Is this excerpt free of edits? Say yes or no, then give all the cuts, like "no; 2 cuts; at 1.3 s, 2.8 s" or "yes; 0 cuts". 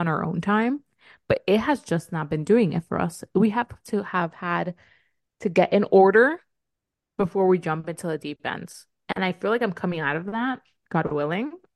yes; 0 cuts